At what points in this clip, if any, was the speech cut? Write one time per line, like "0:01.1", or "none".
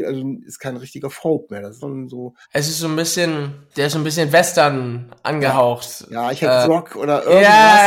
0:01.8
0:02.4
0:03.7
0:06.6